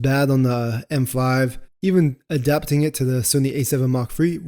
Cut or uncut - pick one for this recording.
uncut